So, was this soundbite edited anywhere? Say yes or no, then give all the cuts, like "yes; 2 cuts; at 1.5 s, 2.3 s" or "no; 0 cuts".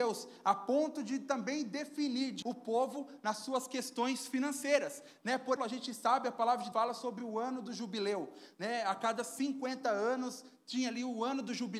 yes; 3 cuts; at 2.4 s, 5.6 s, 6.7 s